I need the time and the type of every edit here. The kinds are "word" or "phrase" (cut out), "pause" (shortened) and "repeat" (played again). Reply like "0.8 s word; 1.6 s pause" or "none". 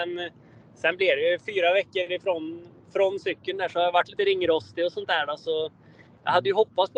4.1 s phrase